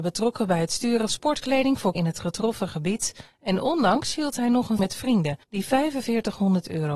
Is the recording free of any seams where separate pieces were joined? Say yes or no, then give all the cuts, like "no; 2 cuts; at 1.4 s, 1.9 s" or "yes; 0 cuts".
no; 4 cuts; at 1.1 s, 1.9 s, 4.8 s, 5.4 s